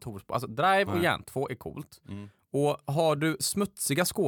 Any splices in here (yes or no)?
no